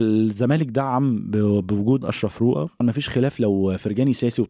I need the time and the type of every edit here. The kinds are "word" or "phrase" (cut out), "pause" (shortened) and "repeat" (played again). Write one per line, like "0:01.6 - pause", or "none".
0:02.0 - word
0:02.8 - word